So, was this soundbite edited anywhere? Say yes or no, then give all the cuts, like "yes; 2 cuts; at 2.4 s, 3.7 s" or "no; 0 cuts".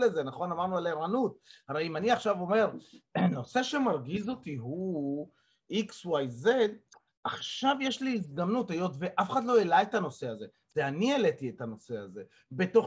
no; 0 cuts